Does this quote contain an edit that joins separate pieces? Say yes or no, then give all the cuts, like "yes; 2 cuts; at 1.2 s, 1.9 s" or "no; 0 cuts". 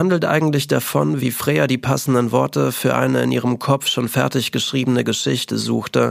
no; 0 cuts